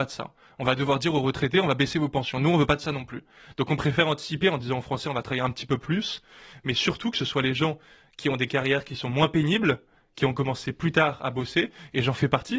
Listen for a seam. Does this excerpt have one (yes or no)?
no